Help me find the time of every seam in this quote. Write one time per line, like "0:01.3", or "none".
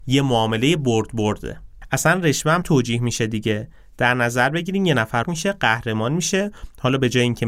0:02.6
0:05.2

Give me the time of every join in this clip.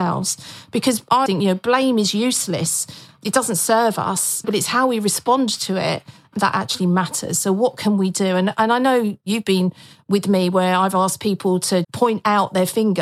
0:01.3
0:04.4
0:11.8

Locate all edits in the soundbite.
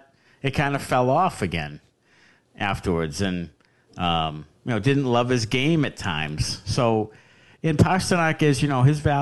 none

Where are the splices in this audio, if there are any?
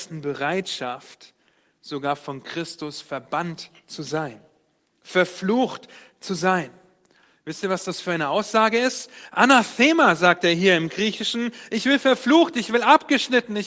none

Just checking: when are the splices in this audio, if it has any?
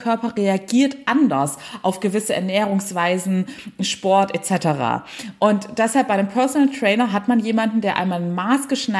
none

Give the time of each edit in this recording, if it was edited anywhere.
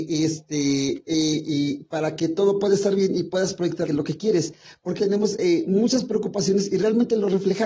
0:03.9
0:05.0

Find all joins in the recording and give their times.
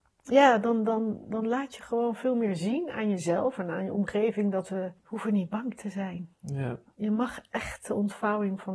0:05.0
0:06.3

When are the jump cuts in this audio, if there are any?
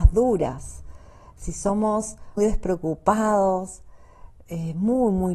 0:02.4

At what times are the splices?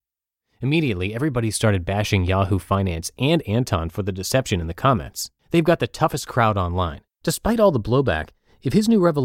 0:05.4
0:07.1

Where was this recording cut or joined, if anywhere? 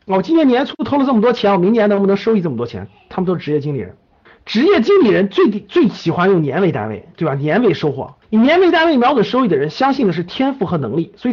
0:04.3
0:07.1
0:08.2

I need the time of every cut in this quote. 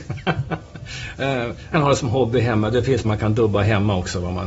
0:01.7
0:03.0

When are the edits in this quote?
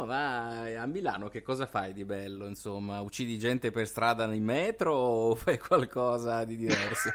none

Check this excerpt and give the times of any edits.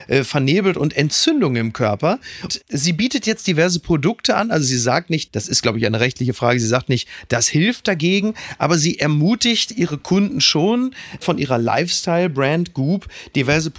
0:02.5

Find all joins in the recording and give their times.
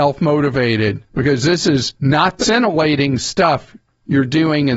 0:01.1
0:02.0
0:02.4
0:03.9

